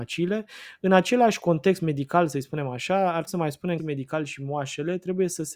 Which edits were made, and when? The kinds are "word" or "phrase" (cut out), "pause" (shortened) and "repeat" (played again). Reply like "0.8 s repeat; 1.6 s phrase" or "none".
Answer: 3.3 s word; 3.8 s phrase